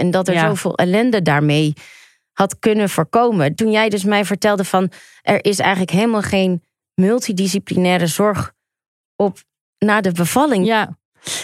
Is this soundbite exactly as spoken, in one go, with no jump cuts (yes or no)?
yes